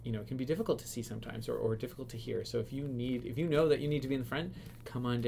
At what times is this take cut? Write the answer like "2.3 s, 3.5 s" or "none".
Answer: none